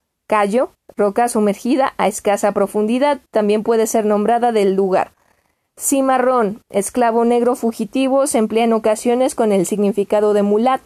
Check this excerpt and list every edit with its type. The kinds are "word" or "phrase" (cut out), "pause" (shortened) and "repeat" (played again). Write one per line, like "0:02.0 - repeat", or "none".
none